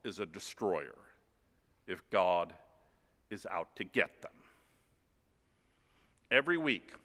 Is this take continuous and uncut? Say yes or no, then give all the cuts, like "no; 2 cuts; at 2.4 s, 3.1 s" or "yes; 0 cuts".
yes; 0 cuts